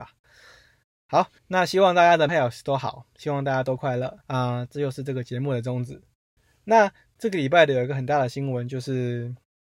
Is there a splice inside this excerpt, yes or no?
yes